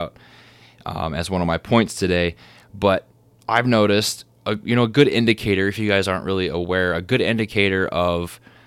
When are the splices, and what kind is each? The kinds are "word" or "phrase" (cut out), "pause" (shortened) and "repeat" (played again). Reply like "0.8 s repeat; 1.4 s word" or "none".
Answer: none